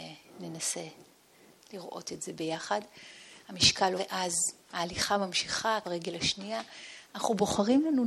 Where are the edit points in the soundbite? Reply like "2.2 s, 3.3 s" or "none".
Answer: 4.0 s, 4.6 s, 5.8 s